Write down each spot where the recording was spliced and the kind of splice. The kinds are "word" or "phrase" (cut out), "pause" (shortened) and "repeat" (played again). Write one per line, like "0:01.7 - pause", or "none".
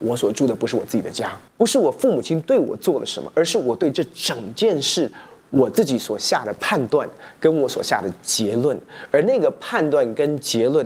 0:01.5 - pause